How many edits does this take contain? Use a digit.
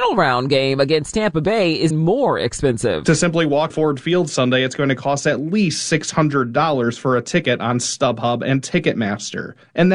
2